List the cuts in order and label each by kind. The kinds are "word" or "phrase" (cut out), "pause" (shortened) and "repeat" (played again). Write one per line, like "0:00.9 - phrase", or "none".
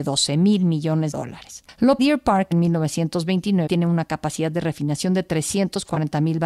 0:01.1 - word
0:02.0 - phrase
0:02.5 - phrase
0:03.7 - word